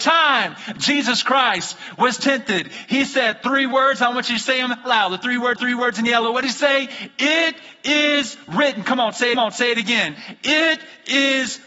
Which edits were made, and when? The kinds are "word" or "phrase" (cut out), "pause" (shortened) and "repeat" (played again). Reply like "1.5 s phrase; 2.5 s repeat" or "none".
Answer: 4.8 s word; 5.6 s repeat; 9.3 s repeat